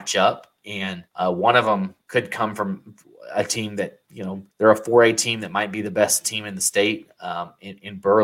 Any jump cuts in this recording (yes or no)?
yes